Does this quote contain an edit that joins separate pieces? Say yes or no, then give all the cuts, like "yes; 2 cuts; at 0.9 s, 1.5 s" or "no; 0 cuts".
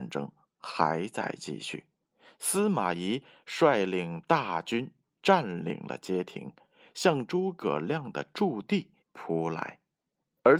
yes; 1 cut; at 9.0 s